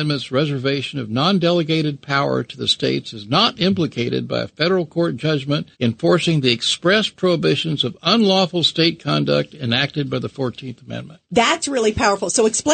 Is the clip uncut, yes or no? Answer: no